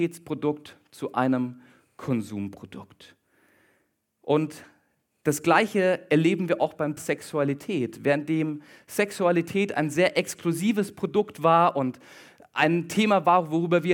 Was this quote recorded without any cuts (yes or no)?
no